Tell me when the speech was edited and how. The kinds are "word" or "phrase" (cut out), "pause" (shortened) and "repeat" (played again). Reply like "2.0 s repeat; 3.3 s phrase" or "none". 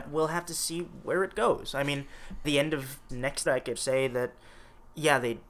2.4 s word; 3.1 s word; 3.5 s word; 3.8 s word